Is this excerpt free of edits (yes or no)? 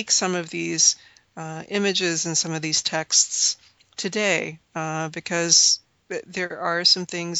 yes